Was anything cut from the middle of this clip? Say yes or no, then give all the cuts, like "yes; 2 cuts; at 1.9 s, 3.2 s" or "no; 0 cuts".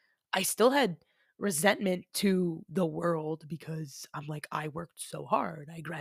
no; 0 cuts